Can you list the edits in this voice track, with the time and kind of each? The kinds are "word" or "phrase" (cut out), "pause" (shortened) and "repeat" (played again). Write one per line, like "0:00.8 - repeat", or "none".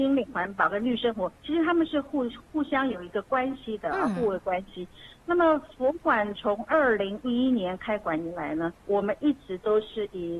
0:01.4 - pause
0:08.8 - pause